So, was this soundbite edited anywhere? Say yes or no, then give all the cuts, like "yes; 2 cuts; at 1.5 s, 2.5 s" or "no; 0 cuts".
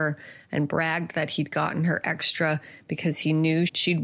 no; 0 cuts